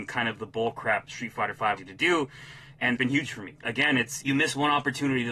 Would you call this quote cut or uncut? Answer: cut